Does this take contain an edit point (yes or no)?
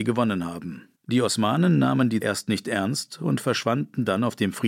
yes